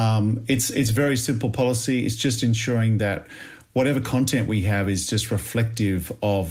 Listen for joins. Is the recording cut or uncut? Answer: uncut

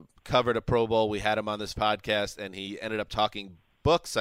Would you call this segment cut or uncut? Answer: cut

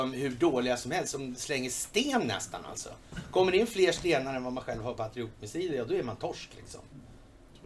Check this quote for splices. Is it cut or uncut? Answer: uncut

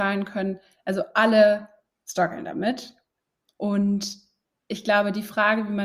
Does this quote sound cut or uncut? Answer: uncut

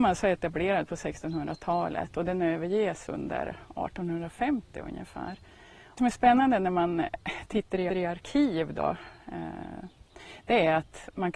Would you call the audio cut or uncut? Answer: cut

